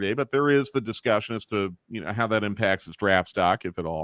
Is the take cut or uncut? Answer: cut